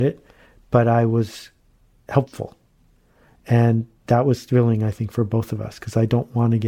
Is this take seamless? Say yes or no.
no